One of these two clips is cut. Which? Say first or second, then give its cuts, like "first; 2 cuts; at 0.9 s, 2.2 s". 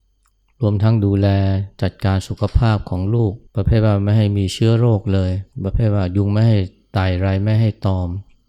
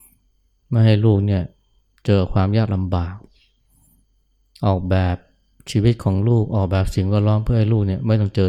first; 2 cuts; at 3.5 s, 5.5 s